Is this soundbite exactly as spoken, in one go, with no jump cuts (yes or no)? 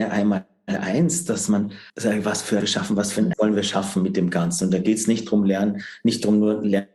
no